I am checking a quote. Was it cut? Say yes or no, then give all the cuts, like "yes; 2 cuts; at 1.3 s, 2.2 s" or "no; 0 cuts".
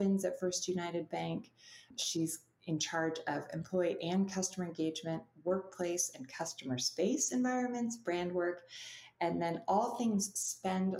no; 0 cuts